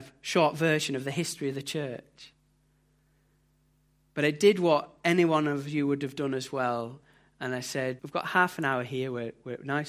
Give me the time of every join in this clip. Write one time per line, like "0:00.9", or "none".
0:08.0